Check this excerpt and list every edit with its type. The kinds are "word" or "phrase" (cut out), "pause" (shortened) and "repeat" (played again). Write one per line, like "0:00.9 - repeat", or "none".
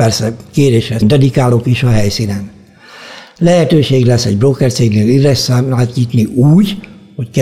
0:01.0 - word